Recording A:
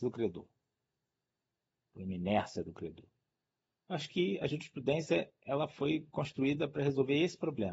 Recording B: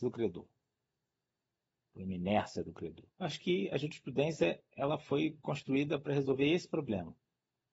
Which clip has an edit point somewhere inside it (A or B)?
B